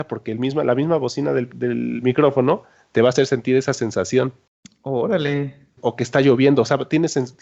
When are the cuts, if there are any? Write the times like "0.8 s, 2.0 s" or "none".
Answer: none